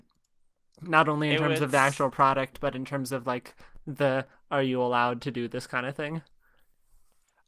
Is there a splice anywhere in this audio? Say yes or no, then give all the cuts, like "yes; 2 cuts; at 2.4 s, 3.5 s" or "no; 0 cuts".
no; 0 cuts